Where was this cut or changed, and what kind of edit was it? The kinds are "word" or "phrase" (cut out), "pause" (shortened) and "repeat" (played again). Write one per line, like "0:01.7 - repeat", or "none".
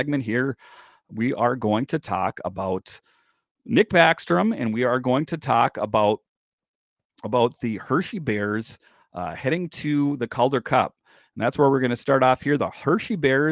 none